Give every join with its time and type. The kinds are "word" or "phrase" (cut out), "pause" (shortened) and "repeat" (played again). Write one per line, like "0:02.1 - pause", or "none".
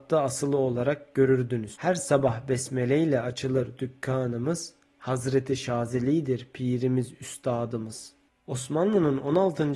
none